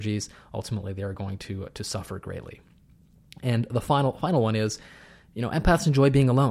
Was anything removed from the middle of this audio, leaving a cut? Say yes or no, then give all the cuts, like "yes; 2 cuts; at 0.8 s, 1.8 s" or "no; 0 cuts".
no; 0 cuts